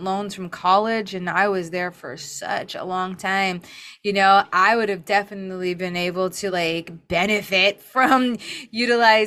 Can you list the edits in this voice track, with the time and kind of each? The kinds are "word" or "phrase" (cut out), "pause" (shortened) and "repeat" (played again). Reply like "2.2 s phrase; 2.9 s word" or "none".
none